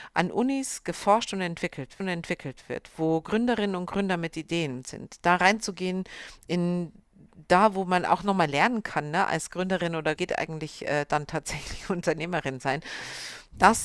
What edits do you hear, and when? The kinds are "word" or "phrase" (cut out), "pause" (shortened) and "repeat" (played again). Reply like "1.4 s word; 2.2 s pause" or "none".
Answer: 2.0 s repeat; 10.2 s phrase